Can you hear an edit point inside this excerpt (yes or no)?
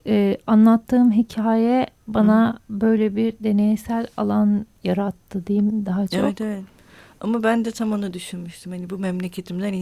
yes